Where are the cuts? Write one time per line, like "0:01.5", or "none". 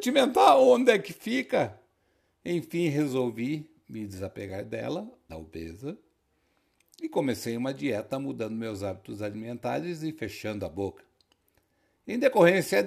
0:05.3

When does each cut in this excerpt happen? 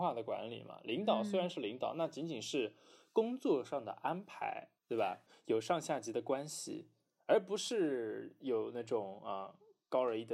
0:04.8

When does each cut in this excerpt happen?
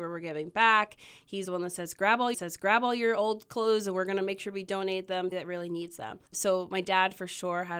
0:01.4
0:02.3
0:05.3
0:06.3

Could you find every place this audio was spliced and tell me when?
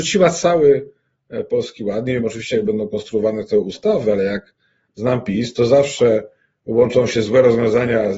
none

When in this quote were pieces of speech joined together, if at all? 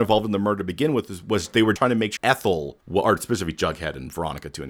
0:01.8
0:02.2
0:02.8

